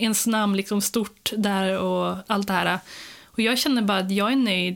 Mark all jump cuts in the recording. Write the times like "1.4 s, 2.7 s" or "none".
none